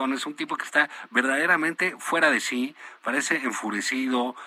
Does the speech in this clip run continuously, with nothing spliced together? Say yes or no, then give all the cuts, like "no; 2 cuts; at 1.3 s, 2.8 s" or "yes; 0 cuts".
yes; 0 cuts